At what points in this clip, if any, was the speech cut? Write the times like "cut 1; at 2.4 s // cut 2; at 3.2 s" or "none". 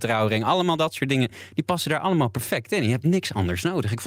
none

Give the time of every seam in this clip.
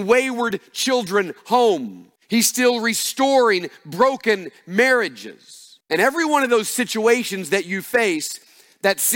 cut 1; at 2.2 s // cut 2; at 5.8 s

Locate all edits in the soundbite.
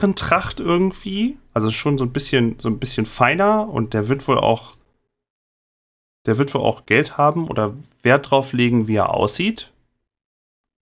none

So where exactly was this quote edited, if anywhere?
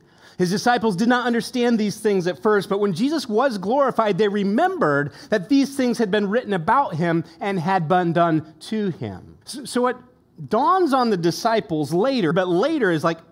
cut 1; at 9.4 s // cut 2; at 12.3 s

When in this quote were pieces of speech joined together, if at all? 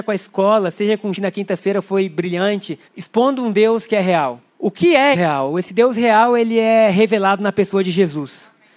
cut 1; at 1.1 s // cut 2; at 2.8 s // cut 3; at 4.5 s // cut 4; at 5.1 s

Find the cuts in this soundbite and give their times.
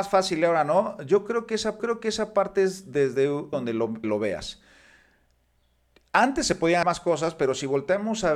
cut 1; at 1.8 s // cut 2; at 3.5 s // cut 3; at 4.0 s // cut 4; at 6.8 s

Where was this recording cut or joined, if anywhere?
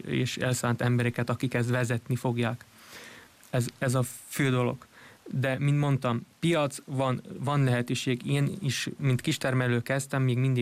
none

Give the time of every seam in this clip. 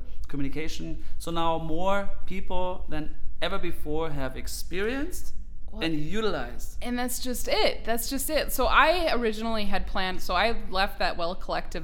none

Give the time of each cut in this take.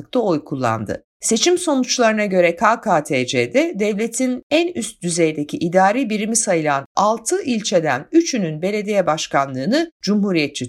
none

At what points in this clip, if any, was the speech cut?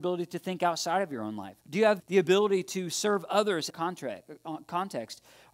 cut 1; at 1.6 s // cut 2; at 2.0 s // cut 3; at 3.7 s

